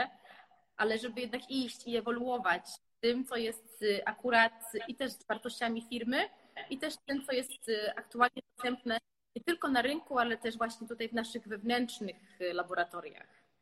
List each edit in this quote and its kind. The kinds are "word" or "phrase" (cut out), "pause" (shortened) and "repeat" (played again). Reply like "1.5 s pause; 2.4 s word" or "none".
none